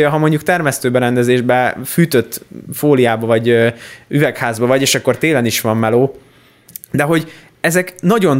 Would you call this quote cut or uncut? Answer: uncut